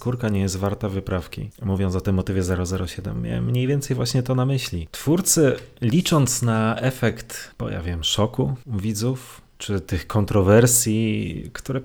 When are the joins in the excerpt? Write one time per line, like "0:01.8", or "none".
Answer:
none